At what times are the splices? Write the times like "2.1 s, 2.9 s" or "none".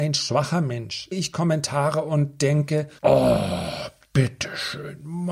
1.1 s, 3.0 s